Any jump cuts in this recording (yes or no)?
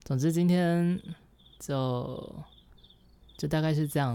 no